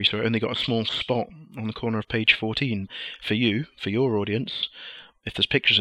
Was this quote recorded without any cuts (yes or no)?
yes